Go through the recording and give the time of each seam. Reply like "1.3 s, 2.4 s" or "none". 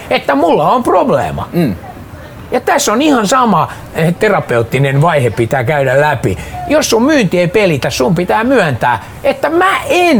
none